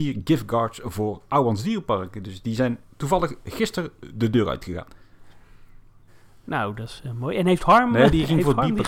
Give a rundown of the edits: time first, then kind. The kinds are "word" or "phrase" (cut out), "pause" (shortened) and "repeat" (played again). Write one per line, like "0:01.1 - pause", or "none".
0:06.1 - pause